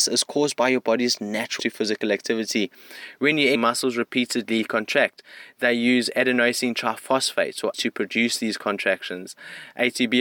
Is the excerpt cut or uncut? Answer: cut